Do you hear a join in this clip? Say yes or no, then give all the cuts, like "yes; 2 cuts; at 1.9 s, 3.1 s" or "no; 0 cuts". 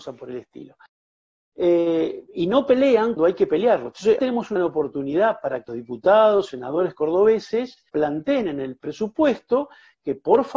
yes; 6 cuts; at 3.2 s, 4.2 s, 4.6 s, 5.7 s, 6.5 s, 7.9 s